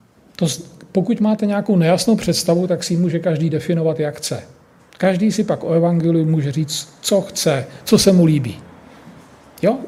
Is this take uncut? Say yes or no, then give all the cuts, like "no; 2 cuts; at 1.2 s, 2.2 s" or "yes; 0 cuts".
yes; 0 cuts